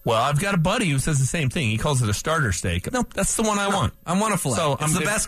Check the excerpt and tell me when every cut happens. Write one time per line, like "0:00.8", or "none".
0:02.9